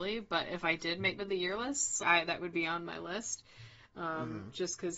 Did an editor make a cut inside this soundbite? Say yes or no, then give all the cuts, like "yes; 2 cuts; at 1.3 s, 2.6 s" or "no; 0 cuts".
yes; 2 cuts; at 1.2 s, 2.0 s